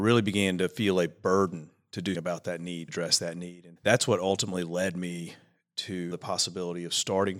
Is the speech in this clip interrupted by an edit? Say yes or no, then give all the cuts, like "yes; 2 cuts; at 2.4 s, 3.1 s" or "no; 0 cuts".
yes; 4 cuts; at 2.1 s, 2.9 s, 3.8 s, 6.1 s